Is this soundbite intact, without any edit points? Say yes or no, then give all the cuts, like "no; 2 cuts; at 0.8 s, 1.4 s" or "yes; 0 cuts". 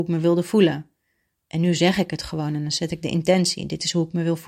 yes; 0 cuts